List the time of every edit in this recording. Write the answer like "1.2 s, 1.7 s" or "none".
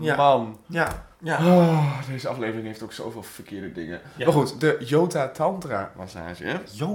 1.1 s